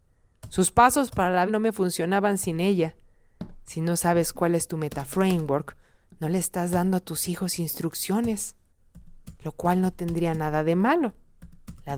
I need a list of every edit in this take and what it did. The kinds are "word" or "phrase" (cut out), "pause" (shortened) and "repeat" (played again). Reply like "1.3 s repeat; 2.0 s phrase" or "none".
1.5 s word